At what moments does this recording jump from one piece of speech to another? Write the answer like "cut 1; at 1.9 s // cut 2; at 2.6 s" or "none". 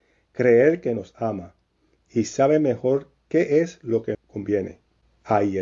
cut 1; at 4.1 s